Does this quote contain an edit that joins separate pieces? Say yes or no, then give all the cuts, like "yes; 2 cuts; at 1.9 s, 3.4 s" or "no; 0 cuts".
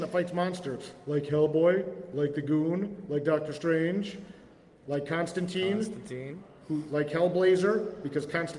no; 0 cuts